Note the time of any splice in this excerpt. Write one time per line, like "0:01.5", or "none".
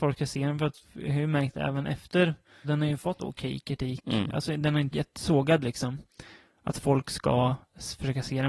0:02.6
0:03.2
0:04.9